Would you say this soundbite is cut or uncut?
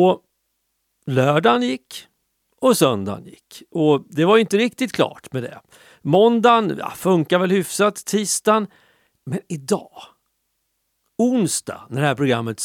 uncut